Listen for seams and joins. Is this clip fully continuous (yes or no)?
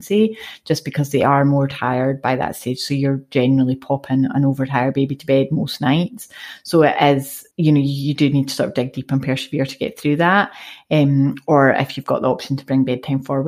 no